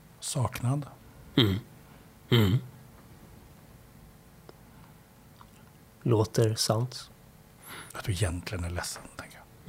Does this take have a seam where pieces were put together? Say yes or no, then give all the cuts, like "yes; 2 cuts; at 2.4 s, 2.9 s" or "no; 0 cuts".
yes; 2 cuts; at 1.9 s, 7.9 s